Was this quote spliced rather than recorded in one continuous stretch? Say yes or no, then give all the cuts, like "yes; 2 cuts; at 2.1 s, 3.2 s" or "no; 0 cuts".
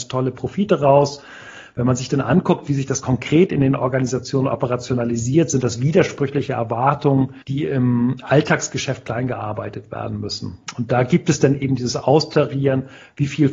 yes; 1 cut; at 7.4 s